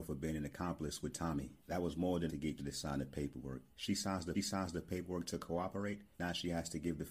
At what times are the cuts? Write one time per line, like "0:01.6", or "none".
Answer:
0:01.6
0:02.3
0:02.6
0:03.7
0:04.3
0:06.1